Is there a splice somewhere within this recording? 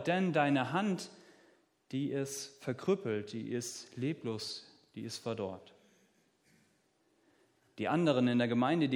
no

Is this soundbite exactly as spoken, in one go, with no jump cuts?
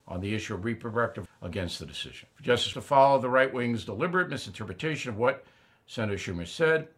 no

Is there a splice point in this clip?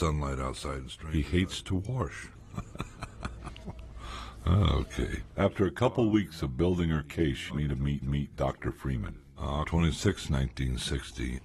yes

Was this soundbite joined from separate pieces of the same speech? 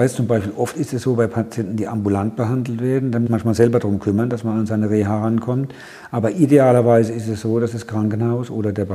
yes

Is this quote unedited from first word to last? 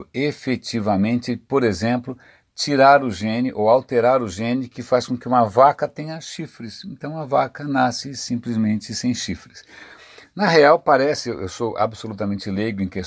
yes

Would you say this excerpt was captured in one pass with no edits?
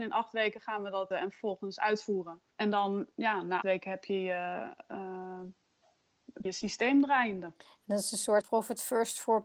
no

